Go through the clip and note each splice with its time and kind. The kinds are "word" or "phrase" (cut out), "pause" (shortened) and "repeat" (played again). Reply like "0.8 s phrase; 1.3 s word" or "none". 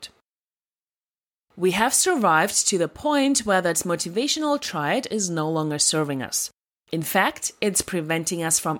none